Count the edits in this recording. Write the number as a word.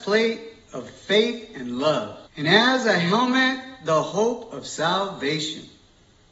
one